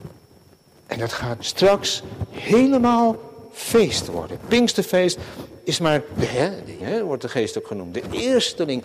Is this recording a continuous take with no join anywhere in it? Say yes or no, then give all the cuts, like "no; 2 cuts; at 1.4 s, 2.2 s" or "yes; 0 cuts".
no; 2 cuts; at 1.4 s, 6.8 s